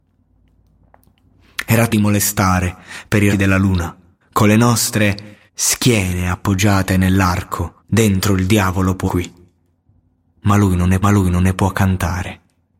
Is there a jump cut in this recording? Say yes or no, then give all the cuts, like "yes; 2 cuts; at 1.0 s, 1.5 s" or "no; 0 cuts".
yes; 7 cuts; at 1.9 s, 3.3 s, 4.2 s, 5.5 s, 7.8 s, 9.1 s, 11.0 s